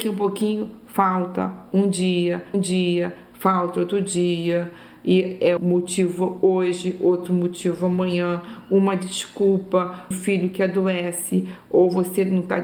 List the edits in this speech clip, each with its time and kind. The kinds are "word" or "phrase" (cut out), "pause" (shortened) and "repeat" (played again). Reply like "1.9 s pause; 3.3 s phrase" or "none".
2.5 s repeat; 5.6 s word; 10.1 s word